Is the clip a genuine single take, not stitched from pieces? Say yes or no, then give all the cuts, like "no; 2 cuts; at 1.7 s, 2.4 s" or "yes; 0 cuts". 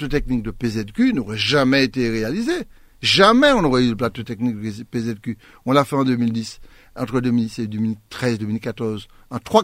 yes; 0 cuts